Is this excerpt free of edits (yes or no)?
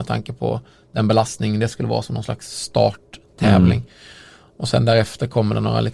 yes